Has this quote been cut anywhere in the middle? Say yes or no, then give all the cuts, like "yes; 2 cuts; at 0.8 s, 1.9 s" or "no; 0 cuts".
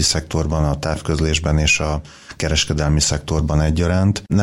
no; 0 cuts